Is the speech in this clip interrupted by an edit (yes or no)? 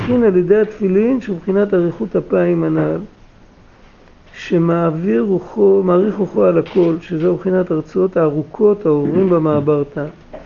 no